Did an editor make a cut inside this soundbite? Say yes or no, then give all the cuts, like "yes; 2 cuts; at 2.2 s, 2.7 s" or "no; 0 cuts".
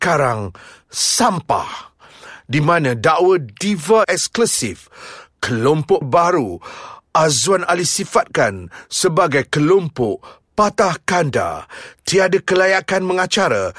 yes; 2 cuts; at 4.0 s, 6.0 s